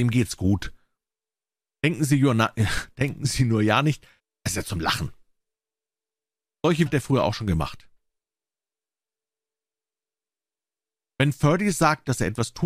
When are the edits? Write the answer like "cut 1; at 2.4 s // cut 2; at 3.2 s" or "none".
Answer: cut 1; at 4.2 s // cut 2; at 6.9 s

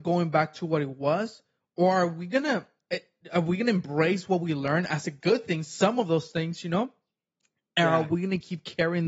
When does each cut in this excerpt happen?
none

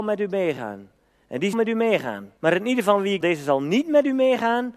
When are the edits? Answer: cut 1; at 1.5 s // cut 2; at 2.4 s // cut 3; at 3.2 s

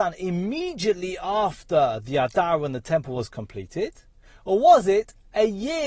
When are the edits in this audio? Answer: none

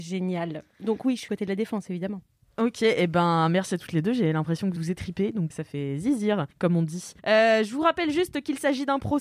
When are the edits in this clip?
cut 1; at 1.3 s // cut 2; at 4.8 s // cut 3; at 5.5 s // cut 4; at 6.5 s // cut 5; at 7.2 s

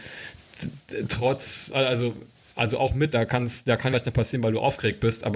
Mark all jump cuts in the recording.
cut 1; at 1.7 s // cut 2; at 3.1 s // cut 3; at 3.9 s

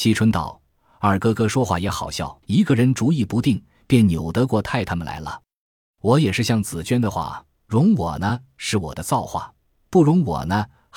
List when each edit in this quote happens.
cut 1; at 2.4 s

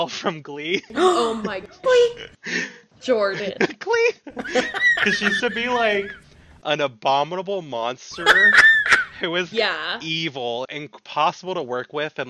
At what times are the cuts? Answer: cut 1; at 1.8 s // cut 2; at 5.4 s // cut 3; at 9.5 s // cut 4; at 10.6 s

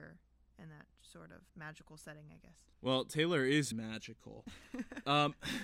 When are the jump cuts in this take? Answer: cut 1; at 1.5 s // cut 2; at 2.7 s // cut 3; at 3.7 s

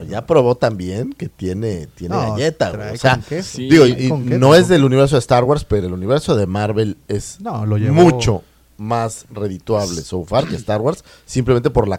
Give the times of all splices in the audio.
none

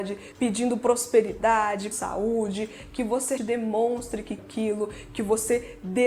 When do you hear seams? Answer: cut 1; at 1.9 s // cut 2; at 3.4 s // cut 3; at 4.4 s

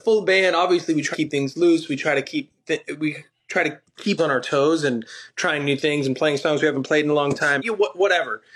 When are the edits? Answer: cut 1; at 1.1 s // cut 2; at 4.2 s // cut 3; at 7.6 s

